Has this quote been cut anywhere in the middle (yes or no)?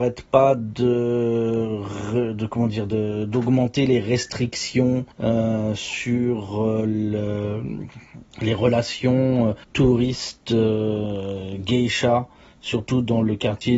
yes